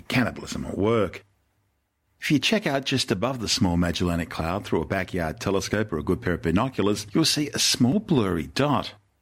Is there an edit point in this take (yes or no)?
no